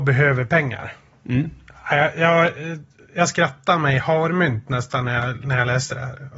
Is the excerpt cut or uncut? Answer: uncut